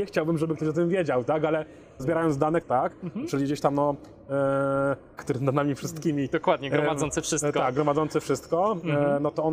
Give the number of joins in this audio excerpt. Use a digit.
3